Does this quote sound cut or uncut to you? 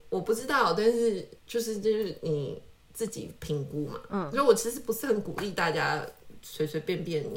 cut